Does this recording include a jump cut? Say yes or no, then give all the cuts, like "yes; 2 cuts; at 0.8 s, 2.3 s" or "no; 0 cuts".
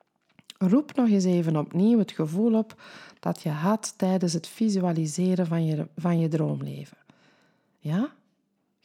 no; 0 cuts